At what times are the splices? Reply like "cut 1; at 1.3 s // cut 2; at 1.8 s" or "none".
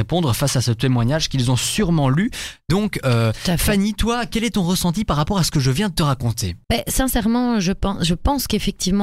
cut 1; at 6.6 s